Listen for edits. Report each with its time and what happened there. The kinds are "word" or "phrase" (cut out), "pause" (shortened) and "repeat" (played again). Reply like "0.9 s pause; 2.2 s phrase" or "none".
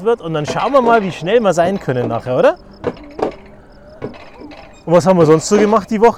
none